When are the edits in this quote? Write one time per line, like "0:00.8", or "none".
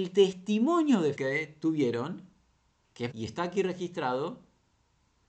0:01.2
0:03.1